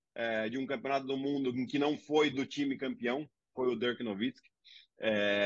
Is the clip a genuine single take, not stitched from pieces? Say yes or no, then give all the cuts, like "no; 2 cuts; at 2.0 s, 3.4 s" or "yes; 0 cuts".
yes; 0 cuts